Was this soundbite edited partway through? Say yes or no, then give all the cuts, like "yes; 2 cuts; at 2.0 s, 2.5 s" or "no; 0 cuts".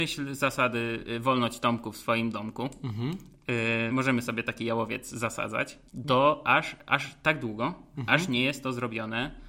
yes; 2 cuts; at 3.9 s, 5.9 s